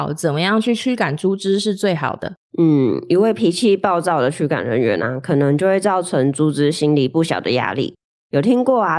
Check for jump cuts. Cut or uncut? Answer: uncut